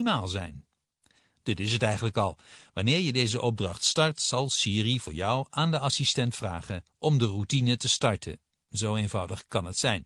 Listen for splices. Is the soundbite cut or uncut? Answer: uncut